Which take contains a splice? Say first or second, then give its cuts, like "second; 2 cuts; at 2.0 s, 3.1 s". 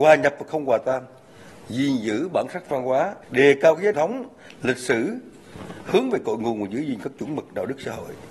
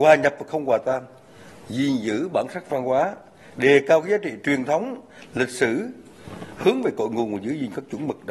first; 2 cuts; at 3.2 s, 3.9 s